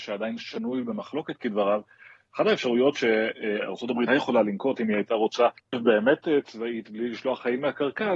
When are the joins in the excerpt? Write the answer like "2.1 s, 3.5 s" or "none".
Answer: 4.1 s, 5.6 s